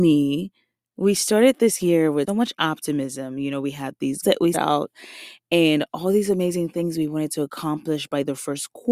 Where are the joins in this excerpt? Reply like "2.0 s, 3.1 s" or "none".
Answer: 2.3 s, 4.2 s, 4.5 s

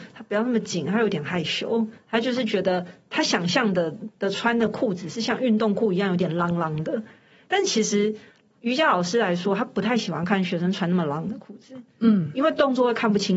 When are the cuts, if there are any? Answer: none

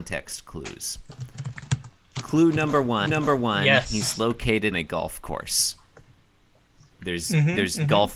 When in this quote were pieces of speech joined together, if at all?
3.1 s, 4.7 s

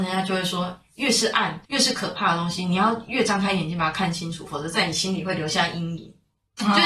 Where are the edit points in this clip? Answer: 1.6 s

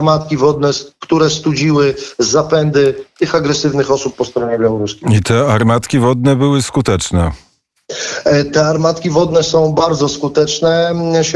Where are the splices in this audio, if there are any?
none

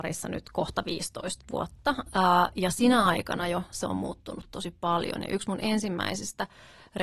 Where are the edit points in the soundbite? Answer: none

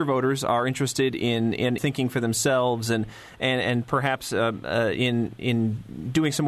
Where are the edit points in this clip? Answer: 1.8 s

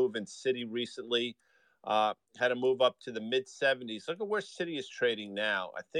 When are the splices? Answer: none

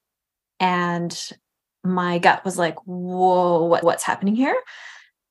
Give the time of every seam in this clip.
3.8 s

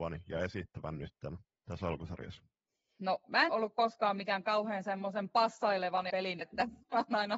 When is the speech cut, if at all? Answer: 1.6 s, 3.5 s, 6.1 s, 6.4 s

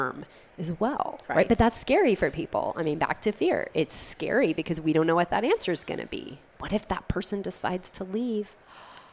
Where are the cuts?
1.2 s, 6.5 s

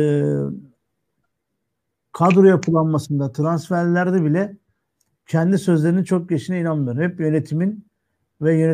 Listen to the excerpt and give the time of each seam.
none

